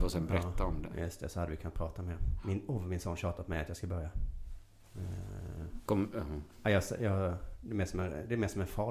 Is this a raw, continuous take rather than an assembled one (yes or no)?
no